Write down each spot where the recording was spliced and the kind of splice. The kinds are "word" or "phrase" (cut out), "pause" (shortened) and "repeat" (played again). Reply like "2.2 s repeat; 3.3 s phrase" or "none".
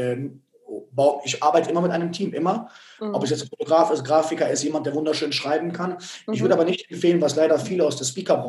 none

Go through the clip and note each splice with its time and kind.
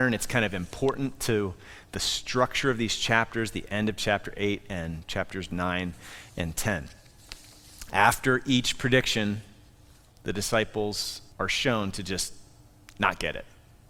11.3 s pause

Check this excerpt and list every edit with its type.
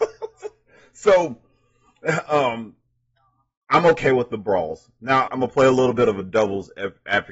5.2 s word

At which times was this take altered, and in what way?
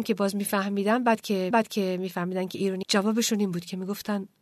1.5 s repeat; 2.8 s word

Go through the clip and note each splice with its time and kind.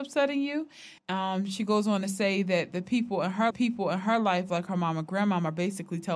1.0 s pause; 3.5 s repeat

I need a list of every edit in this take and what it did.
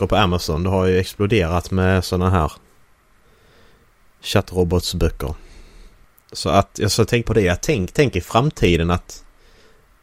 6.0 s pause; 7.2 s phrase

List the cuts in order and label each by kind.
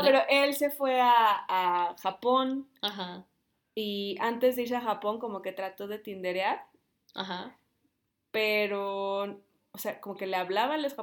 none

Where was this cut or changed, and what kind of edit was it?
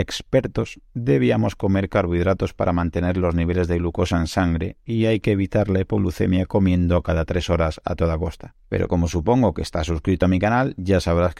none

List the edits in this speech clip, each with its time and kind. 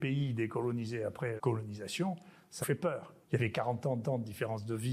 1.4 s word; 2.6 s word; 3.2 s pause; 4.0 s repeat

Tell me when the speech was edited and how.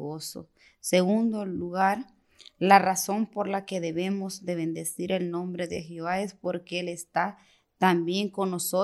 none

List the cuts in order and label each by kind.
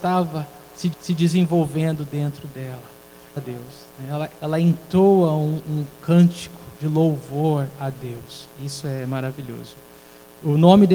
0.9 s repeat; 3.4 s phrase; 4.3 s word; 6.8 s pause; 8.5 s pause

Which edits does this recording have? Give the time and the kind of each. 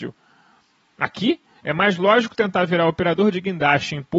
none

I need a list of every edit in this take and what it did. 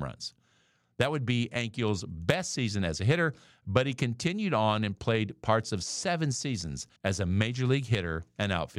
7.0 s pause

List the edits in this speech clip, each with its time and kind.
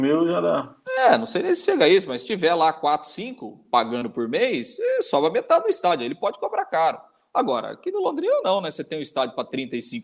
none

